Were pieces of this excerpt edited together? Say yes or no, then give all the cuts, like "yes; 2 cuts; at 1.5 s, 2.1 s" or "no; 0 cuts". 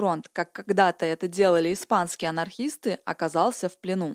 no; 0 cuts